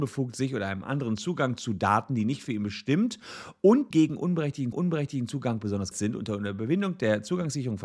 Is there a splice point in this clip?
yes; 3 cuts; at 3.9 s, 4.7 s, 5.9 s

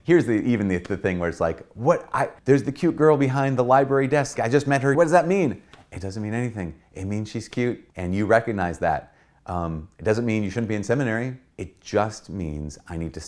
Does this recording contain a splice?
yes; 5 cuts; at 2.4 s, 4.4 s, 4.9 s, 7.9 s, 11.5 s

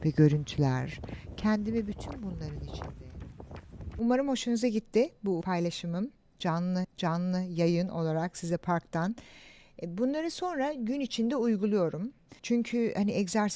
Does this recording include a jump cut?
yes; 3 cuts; at 5.4 s, 6.8 s, 12.4 s

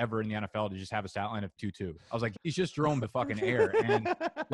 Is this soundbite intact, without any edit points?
no; 4 cuts; at 1.6 s, 2.0 s, 2.3 s, 3.0 s

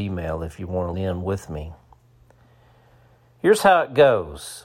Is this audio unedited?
no; 1 cut; at 0.9 s

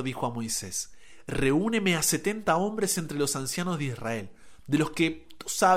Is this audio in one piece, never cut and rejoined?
yes; 0 cuts

